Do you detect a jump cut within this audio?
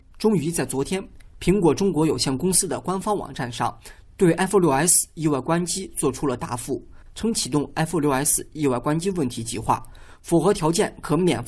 no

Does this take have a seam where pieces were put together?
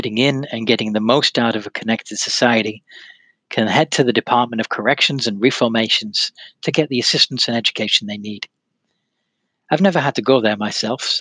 no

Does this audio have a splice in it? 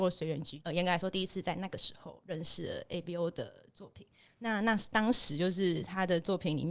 no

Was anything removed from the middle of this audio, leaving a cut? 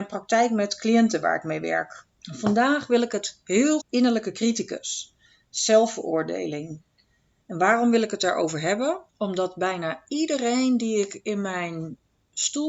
yes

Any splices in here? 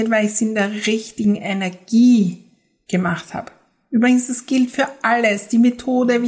no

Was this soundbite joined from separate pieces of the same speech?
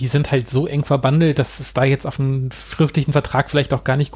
no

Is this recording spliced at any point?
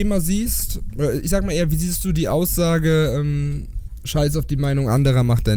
no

